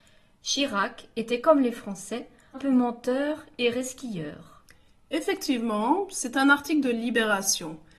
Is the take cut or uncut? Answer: cut